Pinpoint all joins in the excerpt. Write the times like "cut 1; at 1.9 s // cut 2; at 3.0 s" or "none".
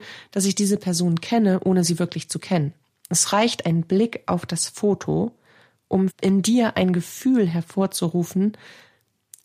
cut 1; at 2.8 s // cut 2; at 6.1 s

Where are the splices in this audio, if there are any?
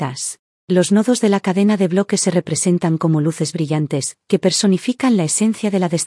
cut 1; at 4.2 s

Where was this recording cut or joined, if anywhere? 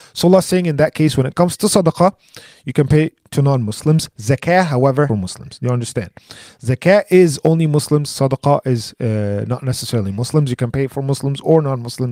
cut 1; at 5.1 s

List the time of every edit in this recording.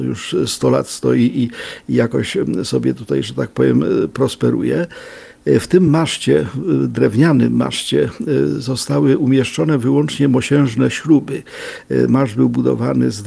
none

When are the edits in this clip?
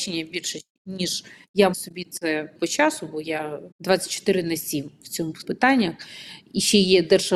cut 1; at 1.7 s // cut 2; at 2.5 s // cut 3; at 3.7 s // cut 4; at 5.4 s

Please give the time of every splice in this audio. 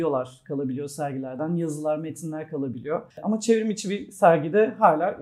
cut 1; at 3.1 s

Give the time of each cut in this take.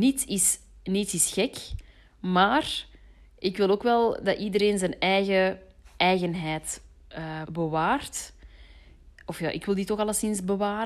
cut 1; at 7.4 s

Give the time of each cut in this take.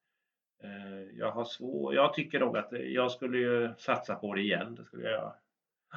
none

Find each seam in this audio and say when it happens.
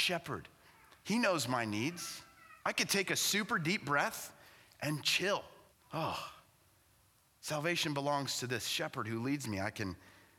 cut 1; at 2.6 s // cut 2; at 5.7 s

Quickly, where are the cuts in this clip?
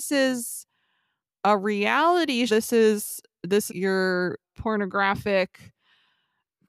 cut 1; at 2.5 s // cut 2; at 3.7 s // cut 3; at 4.4 s

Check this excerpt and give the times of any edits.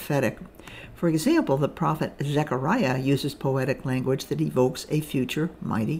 none

